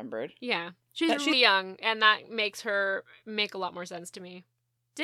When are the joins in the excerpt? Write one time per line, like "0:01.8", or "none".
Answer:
0:01.3